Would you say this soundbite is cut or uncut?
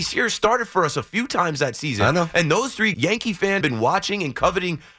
cut